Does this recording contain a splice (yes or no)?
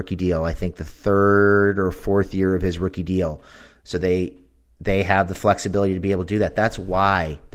no